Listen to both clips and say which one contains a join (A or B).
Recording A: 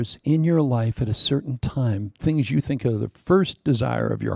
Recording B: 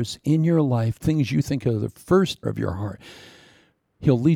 B